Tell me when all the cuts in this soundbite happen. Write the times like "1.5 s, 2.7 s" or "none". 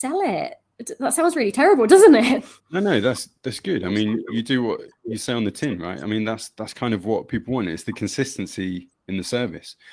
2.6 s

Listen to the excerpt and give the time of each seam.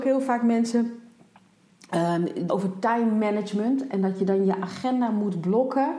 2.5 s

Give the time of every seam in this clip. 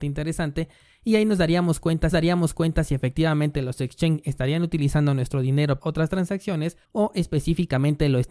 2.1 s, 5.8 s, 6.8 s

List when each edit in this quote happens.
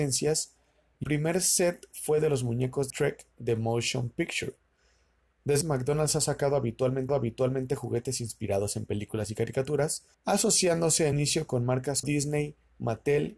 1.0 s, 2.9 s, 5.6 s, 7.1 s, 10.1 s, 11.1 s, 12.0 s

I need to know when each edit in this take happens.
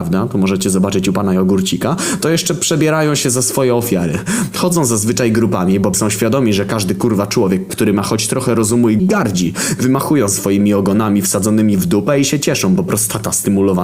5.9 s, 9.0 s

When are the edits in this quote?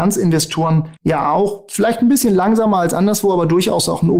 1.0 s

